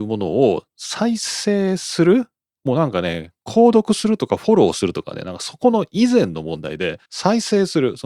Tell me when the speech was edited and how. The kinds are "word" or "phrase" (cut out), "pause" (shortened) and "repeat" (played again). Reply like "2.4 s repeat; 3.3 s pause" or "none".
7.0 s pause